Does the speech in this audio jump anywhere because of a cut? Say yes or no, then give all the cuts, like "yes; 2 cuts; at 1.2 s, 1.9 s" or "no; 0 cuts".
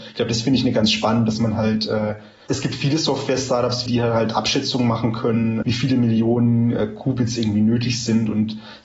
yes; 2 cuts; at 1.3 s, 3.9 s